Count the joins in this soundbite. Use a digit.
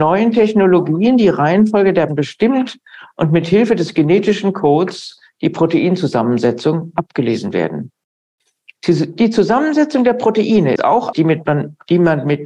3